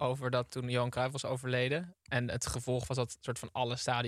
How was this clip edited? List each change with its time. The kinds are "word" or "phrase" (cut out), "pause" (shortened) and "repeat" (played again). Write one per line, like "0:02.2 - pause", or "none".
none

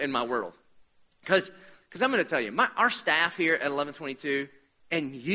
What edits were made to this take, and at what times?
none

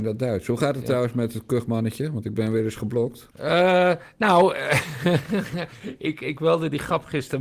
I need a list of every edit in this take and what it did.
0:03.3 - pause

